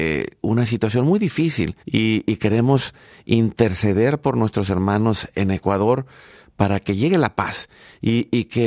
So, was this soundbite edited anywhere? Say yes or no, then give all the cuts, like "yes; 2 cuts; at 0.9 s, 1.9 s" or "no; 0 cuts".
yes; 1 cut; at 1.8 s